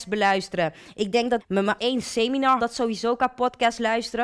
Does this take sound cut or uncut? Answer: cut